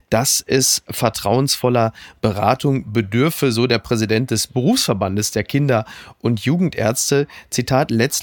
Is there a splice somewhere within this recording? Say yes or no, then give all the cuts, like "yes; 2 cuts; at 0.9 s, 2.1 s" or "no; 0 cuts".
no; 0 cuts